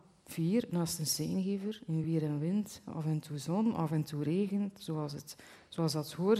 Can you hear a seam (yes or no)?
no